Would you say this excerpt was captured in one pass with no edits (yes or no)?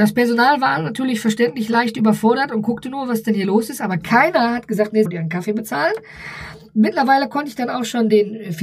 no